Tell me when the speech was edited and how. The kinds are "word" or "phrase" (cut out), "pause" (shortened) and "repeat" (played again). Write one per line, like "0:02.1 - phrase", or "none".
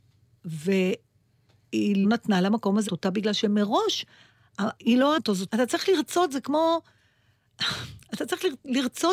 0:02.0 - word
0:02.9 - word
0:04.8 - word
0:05.2 - word
0:05.5 - word